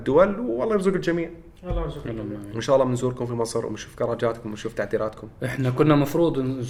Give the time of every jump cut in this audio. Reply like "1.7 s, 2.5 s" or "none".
none